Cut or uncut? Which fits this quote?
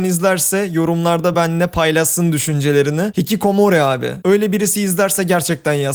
uncut